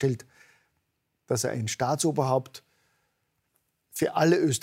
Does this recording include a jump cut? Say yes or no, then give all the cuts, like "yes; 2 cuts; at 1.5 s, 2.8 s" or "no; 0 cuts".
no; 0 cuts